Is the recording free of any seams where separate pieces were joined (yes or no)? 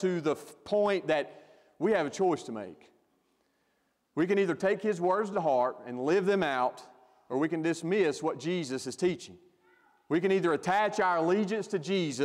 yes